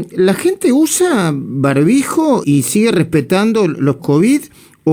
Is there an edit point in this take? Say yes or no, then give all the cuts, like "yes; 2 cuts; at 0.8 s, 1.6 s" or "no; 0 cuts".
yes; 2 cuts; at 2.4 s, 4.0 s